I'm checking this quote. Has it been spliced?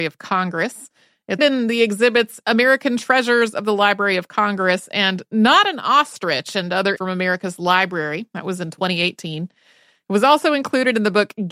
yes; 2 cuts; at 1.4 s, 7.0 s

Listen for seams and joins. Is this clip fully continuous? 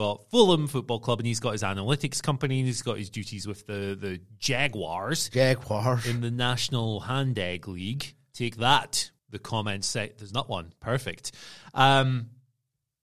no; 1 cut; at 9.2 s

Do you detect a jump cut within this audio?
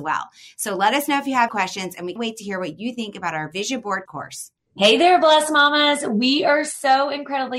yes; 3 cuts; at 1.5 s, 2.2 s, 4.1 s

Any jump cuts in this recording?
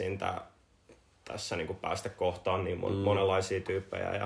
no; 0 cuts

